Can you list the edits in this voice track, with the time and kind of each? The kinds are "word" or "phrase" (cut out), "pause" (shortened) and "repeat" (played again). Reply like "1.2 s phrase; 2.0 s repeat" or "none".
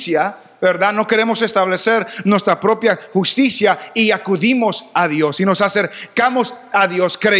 none